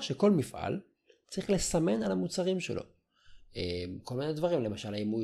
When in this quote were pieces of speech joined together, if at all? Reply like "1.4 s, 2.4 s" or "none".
none